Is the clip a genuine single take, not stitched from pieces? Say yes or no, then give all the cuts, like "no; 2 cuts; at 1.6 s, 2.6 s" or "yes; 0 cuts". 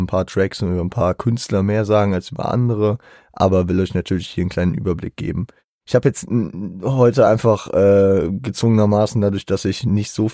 yes; 0 cuts